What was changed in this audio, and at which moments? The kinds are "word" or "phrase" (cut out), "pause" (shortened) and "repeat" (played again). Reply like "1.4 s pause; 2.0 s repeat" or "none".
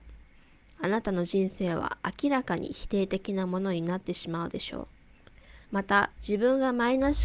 5.7 s pause; 6.1 s pause

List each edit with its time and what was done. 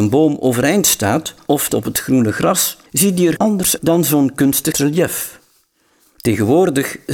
1.7 s word; 2.9 s pause; 3.4 s word; 3.8 s word; 4.7 s word

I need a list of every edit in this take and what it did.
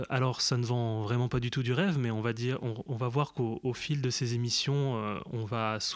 none

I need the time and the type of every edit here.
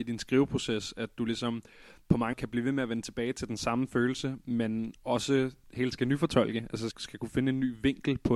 2.3 s word; 5.9 s word; 6.9 s word

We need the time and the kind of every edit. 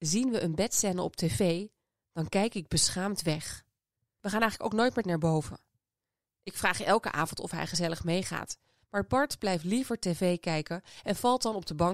5.0 s word

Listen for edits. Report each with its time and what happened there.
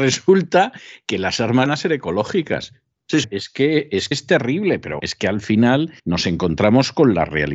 1.7 s word; 3.2 s word; 4.1 s word; 5.0 s word; 6.0 s pause

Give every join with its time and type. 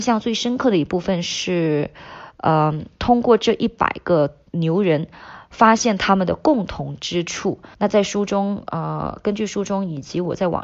4.5 s pause; 7.7 s pause

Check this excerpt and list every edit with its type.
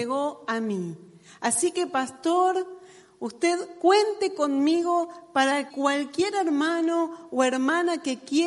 5.7 s word

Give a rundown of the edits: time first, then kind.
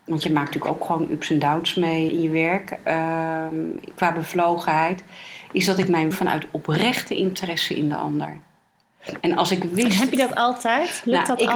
2.1 s word; 6.1 s phrase

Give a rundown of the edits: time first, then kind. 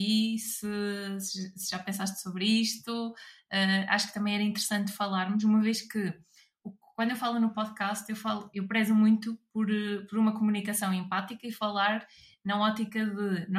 none

